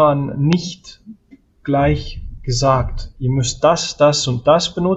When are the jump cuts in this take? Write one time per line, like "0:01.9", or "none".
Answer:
none

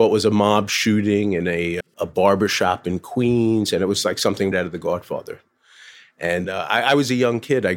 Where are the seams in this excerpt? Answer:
0:01.8
0:04.5
0:06.4

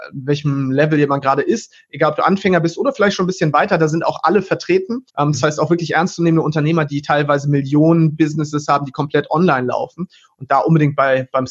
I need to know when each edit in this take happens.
0:05.1

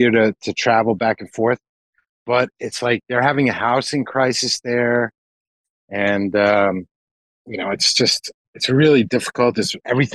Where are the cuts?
none

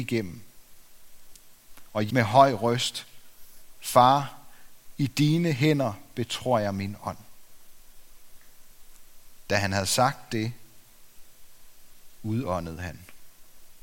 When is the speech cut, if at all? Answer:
0:02.1

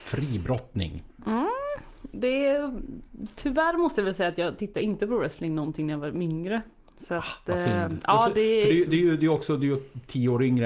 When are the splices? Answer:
none

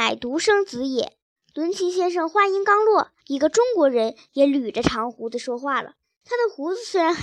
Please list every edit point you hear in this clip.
0:01.4
0:03.2
0:06.0

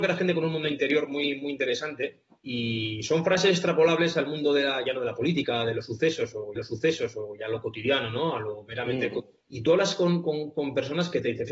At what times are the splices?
0:02.4
0:06.6
0:09.4

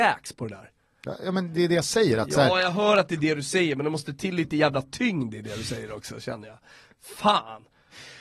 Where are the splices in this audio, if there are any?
none

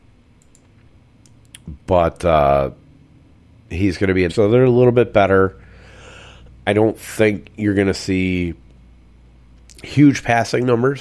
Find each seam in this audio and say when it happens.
0:04.3
0:06.7

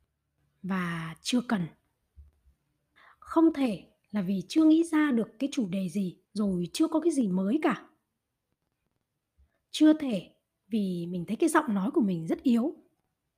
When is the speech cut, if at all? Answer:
0:03.0
0:06.2

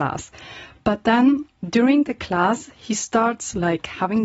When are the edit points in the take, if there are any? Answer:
none

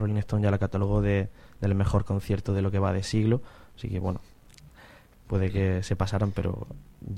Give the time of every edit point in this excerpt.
none

